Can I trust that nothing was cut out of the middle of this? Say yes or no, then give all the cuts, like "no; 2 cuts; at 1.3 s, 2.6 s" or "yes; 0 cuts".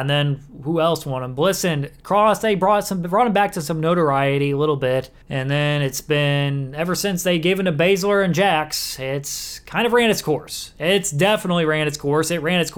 no; 1 cut; at 5.2 s